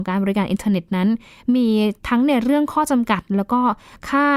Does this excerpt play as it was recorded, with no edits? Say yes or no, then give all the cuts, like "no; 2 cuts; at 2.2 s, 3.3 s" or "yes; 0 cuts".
yes; 0 cuts